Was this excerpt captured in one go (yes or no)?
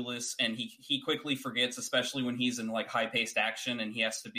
yes